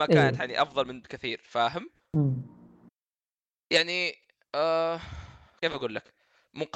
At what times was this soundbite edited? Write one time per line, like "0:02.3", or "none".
none